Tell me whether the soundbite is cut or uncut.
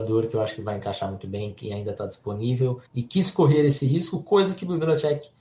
cut